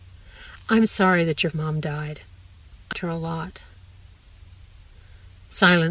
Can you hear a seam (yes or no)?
yes